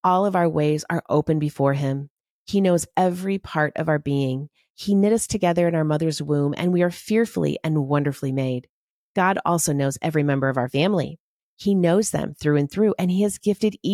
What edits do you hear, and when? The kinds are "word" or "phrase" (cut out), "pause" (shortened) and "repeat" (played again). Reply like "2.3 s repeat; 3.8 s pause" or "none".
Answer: none